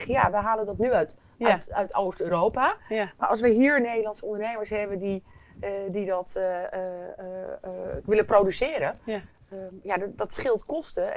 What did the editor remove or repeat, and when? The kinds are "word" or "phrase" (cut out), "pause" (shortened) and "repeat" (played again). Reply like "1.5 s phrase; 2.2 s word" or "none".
none